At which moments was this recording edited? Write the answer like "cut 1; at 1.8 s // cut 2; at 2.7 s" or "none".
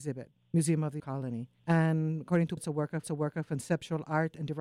cut 1; at 1.0 s // cut 2; at 1.6 s // cut 3; at 2.6 s // cut 4; at 3.0 s